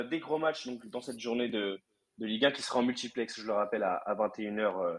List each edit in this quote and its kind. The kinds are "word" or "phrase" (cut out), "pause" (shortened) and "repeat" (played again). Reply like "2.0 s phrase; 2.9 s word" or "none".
none